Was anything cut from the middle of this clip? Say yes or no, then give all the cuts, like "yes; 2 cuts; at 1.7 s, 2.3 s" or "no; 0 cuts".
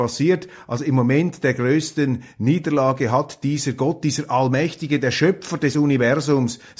no; 0 cuts